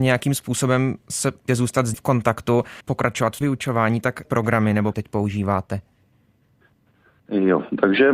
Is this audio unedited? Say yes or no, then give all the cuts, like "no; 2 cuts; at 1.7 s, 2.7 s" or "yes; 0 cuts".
no; 6 cuts; at 1.5 s, 1.9 s, 2.8 s, 3.4 s, 4.2 s, 4.9 s